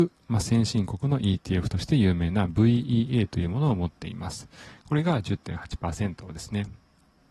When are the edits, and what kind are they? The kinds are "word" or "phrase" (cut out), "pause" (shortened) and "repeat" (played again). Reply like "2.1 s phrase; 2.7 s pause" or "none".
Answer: none